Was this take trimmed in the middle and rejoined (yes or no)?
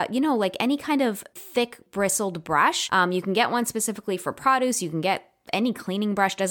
yes